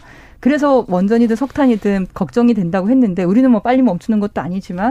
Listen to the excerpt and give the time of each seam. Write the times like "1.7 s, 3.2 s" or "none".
2.1 s